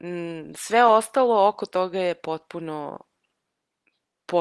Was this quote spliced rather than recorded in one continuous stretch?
no; 0 cuts

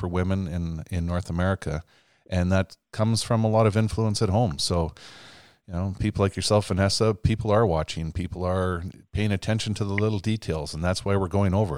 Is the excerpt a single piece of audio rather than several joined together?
yes; 0 cuts

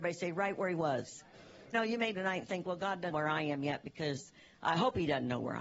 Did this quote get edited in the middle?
yes; 3 cuts; at 1.7 s, 2.1 s, 3.1 s

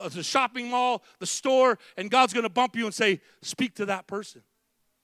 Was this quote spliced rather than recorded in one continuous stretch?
no; 0 cuts

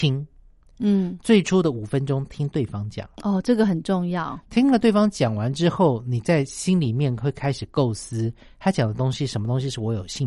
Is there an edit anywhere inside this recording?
yes; 1 cut; at 3.1 s

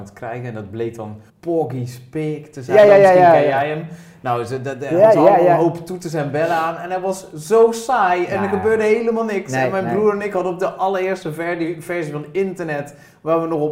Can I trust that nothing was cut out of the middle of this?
no; 2 cuts; at 1.3 s, 2.9 s

